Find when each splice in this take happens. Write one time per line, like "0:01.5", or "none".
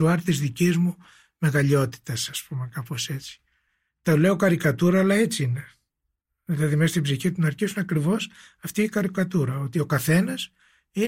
none